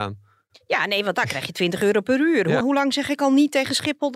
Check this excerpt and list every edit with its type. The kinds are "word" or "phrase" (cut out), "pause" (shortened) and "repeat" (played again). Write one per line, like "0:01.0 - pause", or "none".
0:02.6 - word